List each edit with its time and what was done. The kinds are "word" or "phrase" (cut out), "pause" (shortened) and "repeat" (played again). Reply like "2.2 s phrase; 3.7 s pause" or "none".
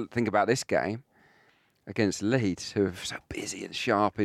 none